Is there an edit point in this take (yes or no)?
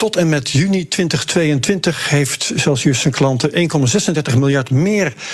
no